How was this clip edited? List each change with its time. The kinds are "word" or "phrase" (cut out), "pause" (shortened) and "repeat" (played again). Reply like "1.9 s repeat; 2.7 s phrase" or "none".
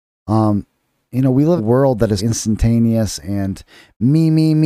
1.6 s phrase; 2.2 s word